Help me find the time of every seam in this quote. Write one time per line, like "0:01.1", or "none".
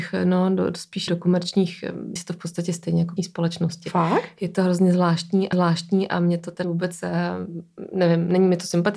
0:01.1
0:02.2
0:03.2
0:05.5
0:06.6